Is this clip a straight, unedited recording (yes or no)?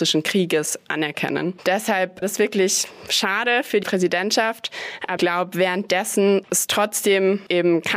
no